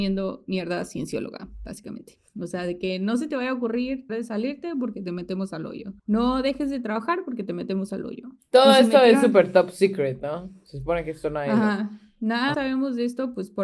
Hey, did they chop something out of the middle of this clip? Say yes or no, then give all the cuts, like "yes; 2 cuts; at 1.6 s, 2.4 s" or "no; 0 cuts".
yes; 4 cuts; at 2.3 s, 4.1 s, 6.0 s, 12.5 s